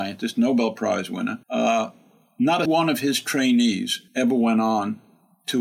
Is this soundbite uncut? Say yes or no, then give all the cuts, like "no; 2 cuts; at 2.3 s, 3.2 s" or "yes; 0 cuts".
no; 3 cuts; at 1.4 s, 2.7 s, 4.1 s